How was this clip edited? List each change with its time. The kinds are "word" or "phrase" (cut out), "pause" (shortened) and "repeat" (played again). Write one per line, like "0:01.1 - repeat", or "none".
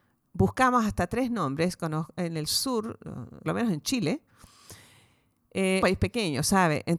0:03.5 - phrase
0:05.8 - phrase